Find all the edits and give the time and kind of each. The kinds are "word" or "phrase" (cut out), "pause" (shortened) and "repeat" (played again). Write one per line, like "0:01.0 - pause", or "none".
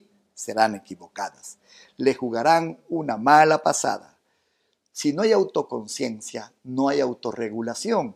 none